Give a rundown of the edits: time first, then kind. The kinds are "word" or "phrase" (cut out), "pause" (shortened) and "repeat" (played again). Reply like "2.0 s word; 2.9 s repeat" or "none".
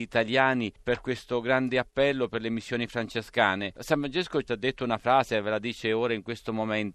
none